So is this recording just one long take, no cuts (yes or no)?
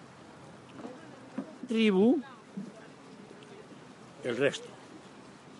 no